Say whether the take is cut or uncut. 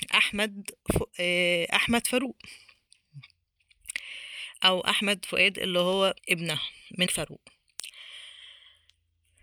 cut